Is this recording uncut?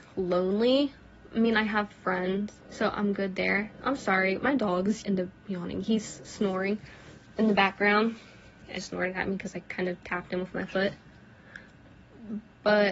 no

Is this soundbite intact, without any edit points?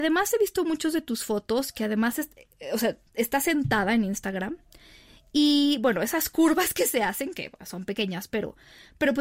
yes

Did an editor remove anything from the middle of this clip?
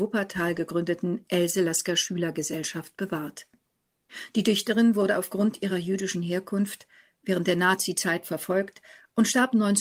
no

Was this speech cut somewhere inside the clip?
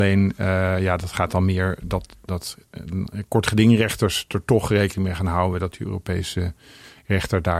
no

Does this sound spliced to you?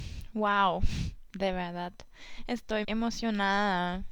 yes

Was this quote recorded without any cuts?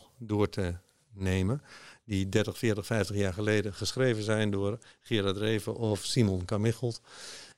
yes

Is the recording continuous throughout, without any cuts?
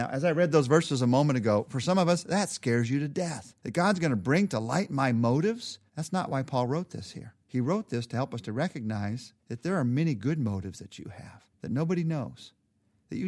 no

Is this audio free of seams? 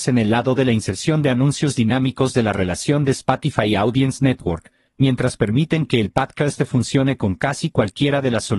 yes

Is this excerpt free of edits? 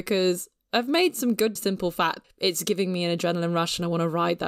no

